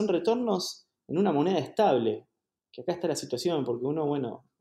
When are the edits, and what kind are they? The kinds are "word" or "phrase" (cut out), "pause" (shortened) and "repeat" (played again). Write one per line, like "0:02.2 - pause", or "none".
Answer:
none